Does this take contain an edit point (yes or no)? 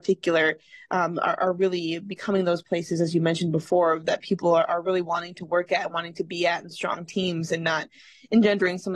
no